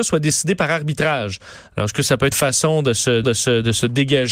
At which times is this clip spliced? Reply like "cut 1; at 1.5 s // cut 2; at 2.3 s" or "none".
cut 1; at 2.3 s // cut 2; at 3.2 s